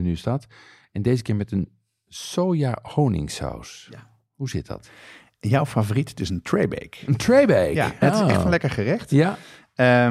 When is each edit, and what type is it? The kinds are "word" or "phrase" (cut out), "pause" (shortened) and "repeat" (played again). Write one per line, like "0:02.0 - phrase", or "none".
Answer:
none